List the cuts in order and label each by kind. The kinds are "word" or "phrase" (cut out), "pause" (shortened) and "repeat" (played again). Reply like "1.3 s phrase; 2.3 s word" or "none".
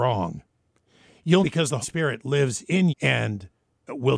1.4 s word; 1.8 s word; 2.9 s word

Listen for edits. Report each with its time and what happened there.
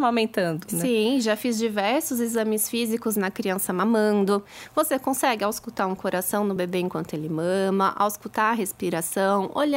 none

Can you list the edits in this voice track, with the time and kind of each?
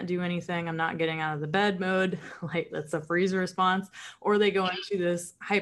2.7 s word

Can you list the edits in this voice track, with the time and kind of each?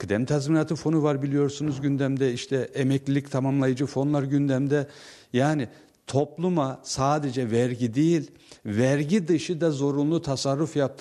none

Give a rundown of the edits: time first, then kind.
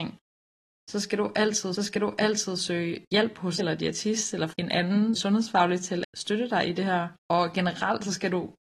1.8 s repeat; 3.6 s word; 4.5 s word; 5.2 s word; 6.0 s word; 7.2 s pause

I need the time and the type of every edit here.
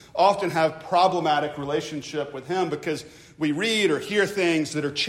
none

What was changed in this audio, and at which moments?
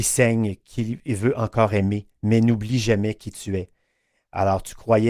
none

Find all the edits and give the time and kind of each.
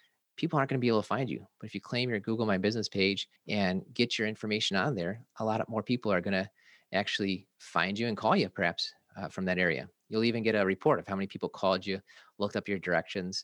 3.4 s pause

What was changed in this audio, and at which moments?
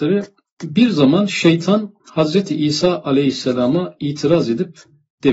2.0 s pause

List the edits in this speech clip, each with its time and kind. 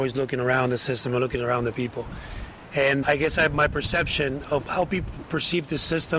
3.0 s word

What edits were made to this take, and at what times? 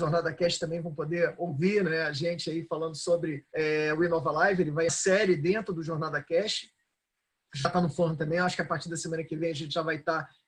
3.5 s pause; 4.9 s phrase

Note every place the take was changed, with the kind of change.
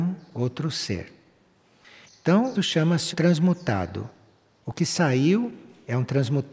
2.5 s word; 3.1 s word

